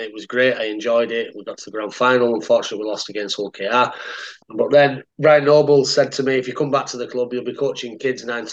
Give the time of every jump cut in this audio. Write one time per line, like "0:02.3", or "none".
0:04.4
0:05.1